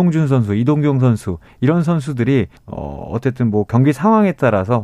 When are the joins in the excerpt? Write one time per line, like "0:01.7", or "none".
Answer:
0:02.6